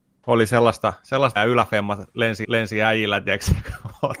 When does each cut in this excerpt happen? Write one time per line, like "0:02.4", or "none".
0:01.4
0:02.4